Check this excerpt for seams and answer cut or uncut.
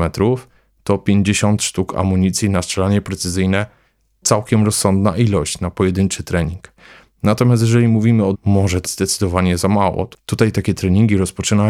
cut